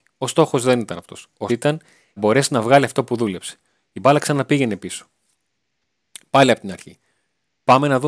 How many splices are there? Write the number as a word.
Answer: two